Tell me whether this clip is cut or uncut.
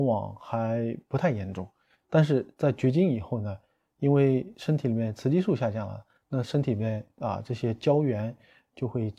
uncut